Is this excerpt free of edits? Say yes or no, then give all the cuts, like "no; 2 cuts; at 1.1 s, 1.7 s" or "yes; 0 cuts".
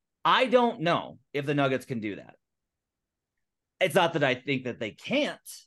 yes; 0 cuts